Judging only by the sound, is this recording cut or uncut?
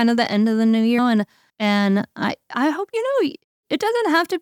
cut